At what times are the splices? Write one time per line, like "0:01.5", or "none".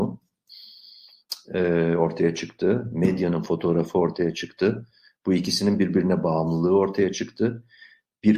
none